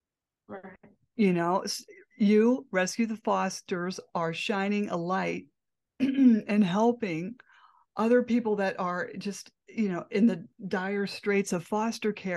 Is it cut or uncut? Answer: uncut